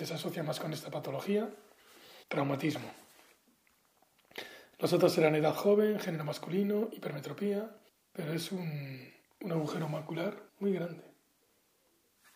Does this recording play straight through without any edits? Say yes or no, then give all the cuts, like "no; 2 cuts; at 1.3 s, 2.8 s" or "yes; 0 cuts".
no; 4 cuts; at 2.2 s, 7.9 s, 9.2 s, 10.5 s